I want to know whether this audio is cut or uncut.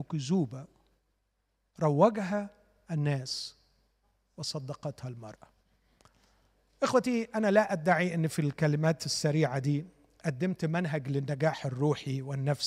uncut